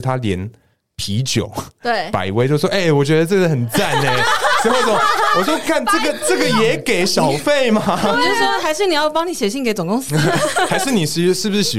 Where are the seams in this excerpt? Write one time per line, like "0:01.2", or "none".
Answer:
none